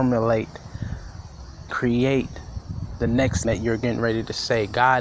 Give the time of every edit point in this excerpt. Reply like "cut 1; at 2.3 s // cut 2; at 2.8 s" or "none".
cut 1; at 1.7 s // cut 2; at 3.4 s

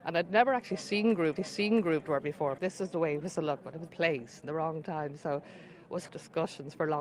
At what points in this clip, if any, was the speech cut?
cut 1; at 1.4 s // cut 2; at 2.6 s // cut 3; at 3.3 s // cut 4; at 3.9 s // cut 5; at 6.1 s

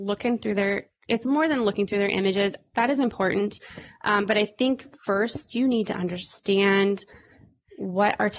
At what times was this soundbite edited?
none

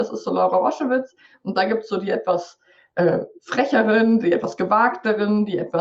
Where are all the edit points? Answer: none

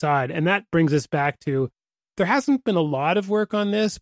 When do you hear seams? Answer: none

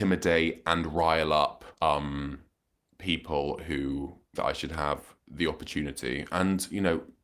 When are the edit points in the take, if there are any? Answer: cut 1; at 1.7 s // cut 2; at 4.4 s

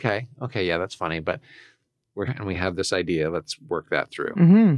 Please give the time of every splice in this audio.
cut 1; at 2.3 s

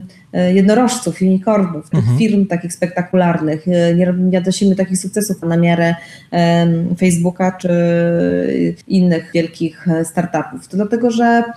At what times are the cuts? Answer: cut 1; at 1.9 s // cut 2; at 5.4 s // cut 3; at 8.8 s

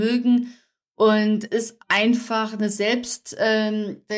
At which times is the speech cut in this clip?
cut 1; at 1.5 s // cut 2; at 1.8 s

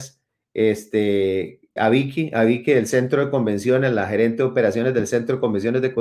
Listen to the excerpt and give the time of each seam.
cut 1; at 1.8 s

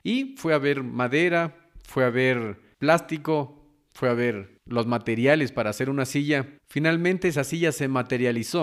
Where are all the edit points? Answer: cut 1; at 6.6 s

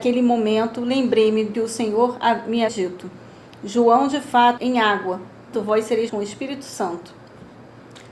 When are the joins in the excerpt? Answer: cut 1; at 1.5 s // cut 2; at 2.7 s // cut 3; at 4.6 s // cut 4; at 5.5 s // cut 5; at 6.1 s

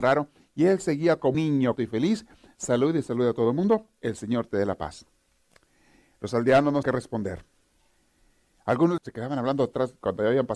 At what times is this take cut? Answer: cut 1; at 1.3 s // cut 2; at 1.8 s // cut 3; at 6.8 s // cut 4; at 9.0 s

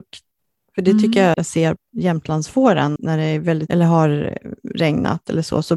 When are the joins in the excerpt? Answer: cut 1; at 1.3 s // cut 2; at 1.8 s // cut 3; at 3.0 s // cut 4; at 3.7 s

